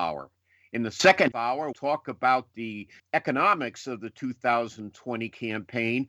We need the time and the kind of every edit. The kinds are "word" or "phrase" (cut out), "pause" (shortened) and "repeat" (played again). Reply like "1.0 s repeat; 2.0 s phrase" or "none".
1.3 s word; 1.7 s word; 3.0 s word